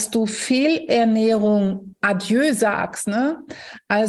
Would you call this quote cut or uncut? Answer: uncut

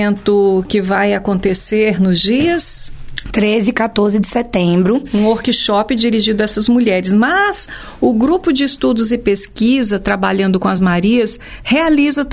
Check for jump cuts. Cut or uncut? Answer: uncut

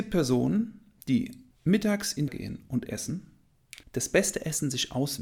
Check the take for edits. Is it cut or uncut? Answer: cut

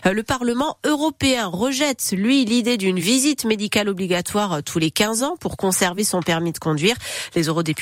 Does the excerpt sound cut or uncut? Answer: uncut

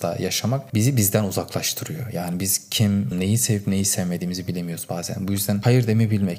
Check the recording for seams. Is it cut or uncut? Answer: cut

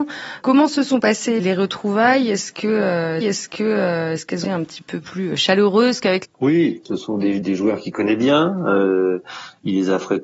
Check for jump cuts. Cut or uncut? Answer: cut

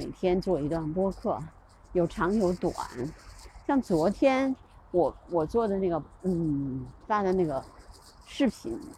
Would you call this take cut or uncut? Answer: uncut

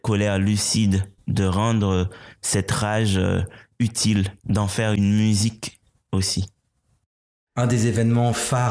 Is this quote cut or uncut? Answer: cut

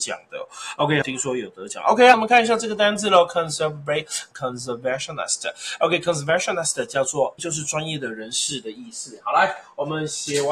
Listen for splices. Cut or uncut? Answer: cut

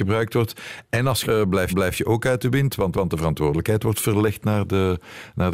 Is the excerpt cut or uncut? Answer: cut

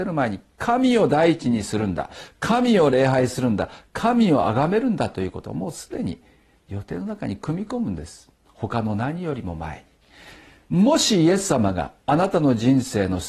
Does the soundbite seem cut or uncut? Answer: uncut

